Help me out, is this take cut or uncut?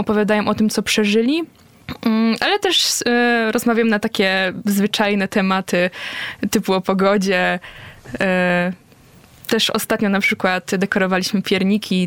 uncut